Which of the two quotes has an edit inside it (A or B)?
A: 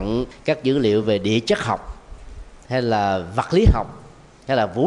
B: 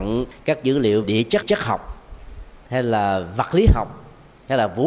B